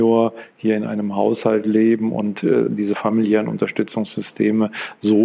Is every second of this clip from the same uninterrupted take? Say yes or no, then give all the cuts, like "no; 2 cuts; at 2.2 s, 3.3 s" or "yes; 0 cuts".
yes; 0 cuts